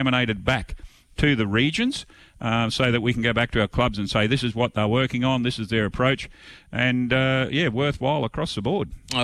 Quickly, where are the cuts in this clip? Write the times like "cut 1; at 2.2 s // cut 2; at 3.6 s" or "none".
none